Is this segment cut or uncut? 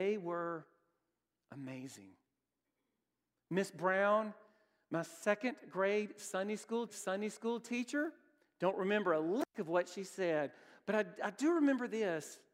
cut